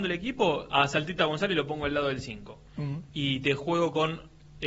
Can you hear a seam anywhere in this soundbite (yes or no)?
no